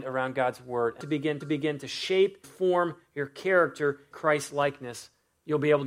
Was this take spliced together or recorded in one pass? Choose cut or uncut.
cut